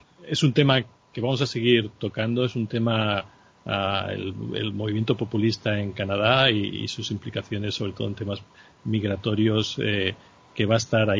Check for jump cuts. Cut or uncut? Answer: uncut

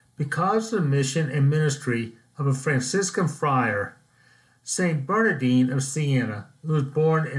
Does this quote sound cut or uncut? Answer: uncut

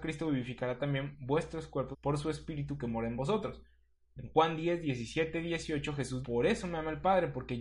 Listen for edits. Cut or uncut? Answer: cut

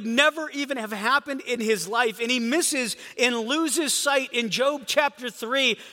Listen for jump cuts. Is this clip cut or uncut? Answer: uncut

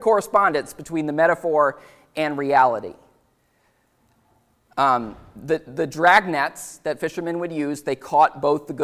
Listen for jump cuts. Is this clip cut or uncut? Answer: uncut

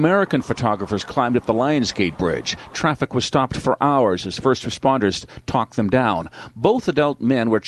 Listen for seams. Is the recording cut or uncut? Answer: uncut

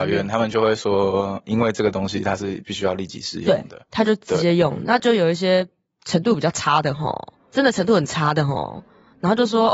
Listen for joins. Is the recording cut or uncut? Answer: uncut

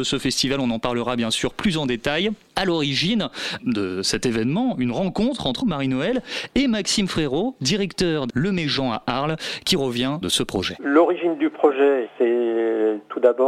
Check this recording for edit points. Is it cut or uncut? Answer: cut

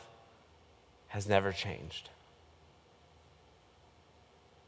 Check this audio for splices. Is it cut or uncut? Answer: uncut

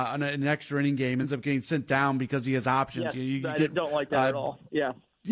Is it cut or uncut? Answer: cut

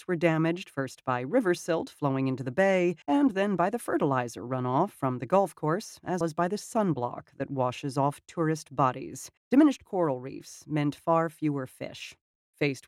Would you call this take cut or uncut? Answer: cut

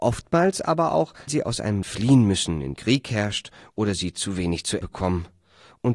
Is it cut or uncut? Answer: cut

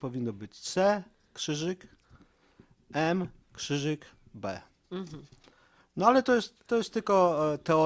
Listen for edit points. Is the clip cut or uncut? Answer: uncut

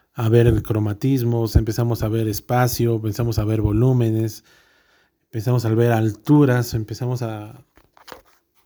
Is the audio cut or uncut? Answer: uncut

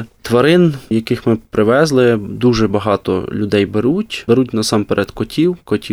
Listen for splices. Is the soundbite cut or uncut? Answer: uncut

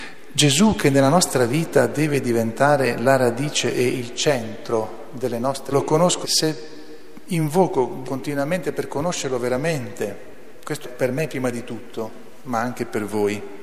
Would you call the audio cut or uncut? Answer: cut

